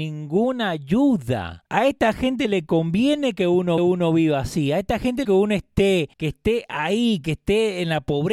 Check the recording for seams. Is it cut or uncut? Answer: cut